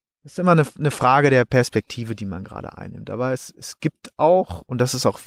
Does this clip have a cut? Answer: no; 0 cuts

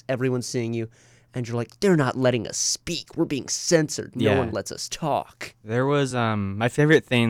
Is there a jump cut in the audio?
no; 0 cuts

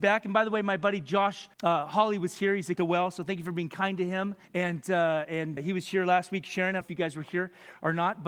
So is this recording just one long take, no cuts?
no; 5 cuts; at 1.5 s, 2.8 s, 4.4 s, 5.6 s, 6.8 s

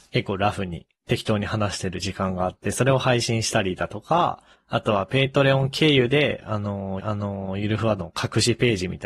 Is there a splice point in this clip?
yes; 4 cuts; at 1.0 s, 4.5 s, 7.0 s, 8.0 s

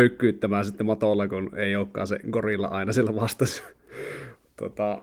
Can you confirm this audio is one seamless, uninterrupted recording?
yes; 0 cuts

